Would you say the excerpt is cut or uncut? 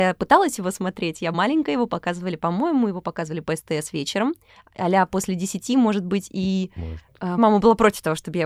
cut